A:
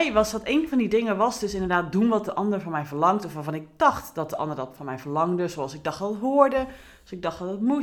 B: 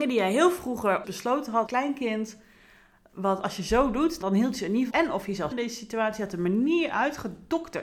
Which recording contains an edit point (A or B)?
B